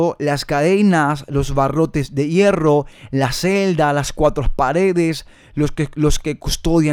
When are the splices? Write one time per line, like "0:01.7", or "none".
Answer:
none